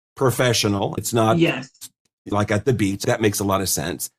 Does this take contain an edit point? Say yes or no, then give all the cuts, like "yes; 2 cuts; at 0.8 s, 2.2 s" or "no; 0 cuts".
yes; 3 cuts; at 1.0 s, 2.3 s, 3.0 s